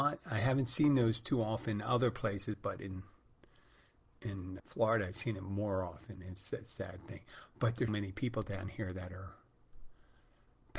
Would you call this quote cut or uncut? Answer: cut